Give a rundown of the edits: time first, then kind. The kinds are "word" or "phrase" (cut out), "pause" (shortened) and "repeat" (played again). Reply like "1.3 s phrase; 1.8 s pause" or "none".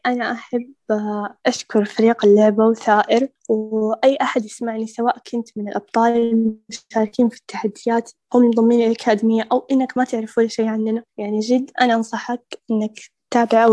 1.4 s pause

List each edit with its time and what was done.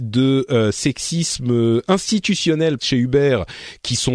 2.8 s word

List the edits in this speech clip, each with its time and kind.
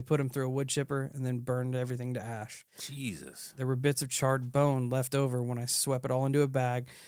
2.7 s pause

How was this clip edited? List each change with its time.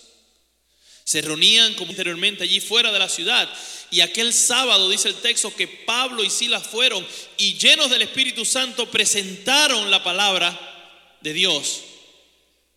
1.9 s word

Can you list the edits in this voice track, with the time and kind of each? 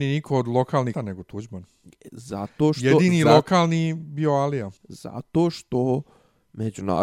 0.9 s word; 4.8 s pause

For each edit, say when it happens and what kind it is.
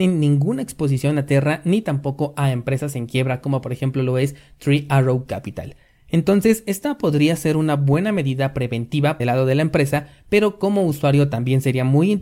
9.2 s phrase

